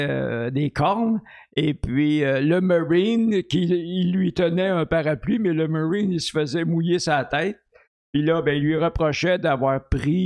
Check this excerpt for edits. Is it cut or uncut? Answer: uncut